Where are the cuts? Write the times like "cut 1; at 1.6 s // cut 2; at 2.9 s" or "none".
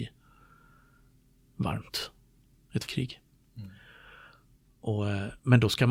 cut 1; at 2.9 s